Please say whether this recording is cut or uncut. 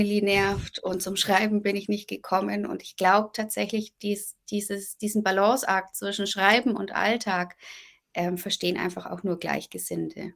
uncut